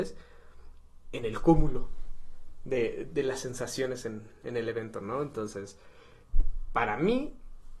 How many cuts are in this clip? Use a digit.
1